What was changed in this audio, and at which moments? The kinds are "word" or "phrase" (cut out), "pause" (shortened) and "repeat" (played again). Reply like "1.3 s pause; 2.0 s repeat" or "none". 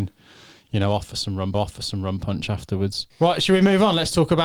1.5 s repeat; 3.1 s pause